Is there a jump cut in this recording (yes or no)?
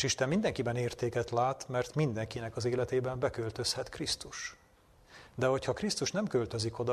no